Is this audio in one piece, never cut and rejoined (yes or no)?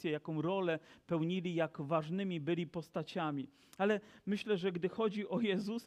yes